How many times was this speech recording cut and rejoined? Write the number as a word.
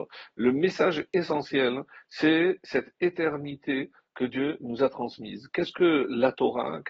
zero